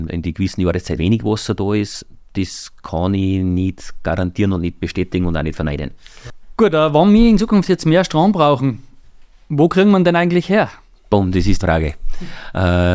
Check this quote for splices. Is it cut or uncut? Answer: cut